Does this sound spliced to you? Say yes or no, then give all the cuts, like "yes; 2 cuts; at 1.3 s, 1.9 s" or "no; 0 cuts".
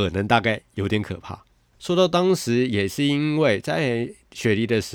no; 0 cuts